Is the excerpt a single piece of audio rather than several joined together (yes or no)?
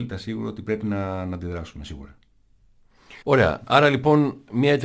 no